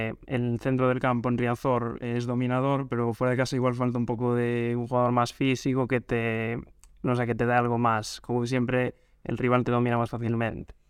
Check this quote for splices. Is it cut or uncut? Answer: uncut